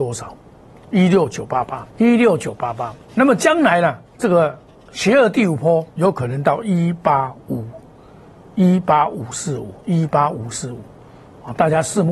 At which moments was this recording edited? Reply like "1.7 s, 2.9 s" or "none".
1.9 s, 3.0 s, 4.1 s, 5.9 s, 7.4 s, 9.8 s